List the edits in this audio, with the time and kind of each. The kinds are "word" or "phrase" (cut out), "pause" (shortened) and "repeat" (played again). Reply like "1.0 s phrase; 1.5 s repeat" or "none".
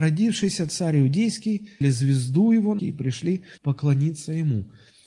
1.8 s phrase; 2.8 s word; 3.6 s pause